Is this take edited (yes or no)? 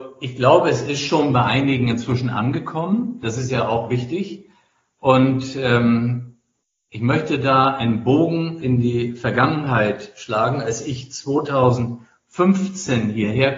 no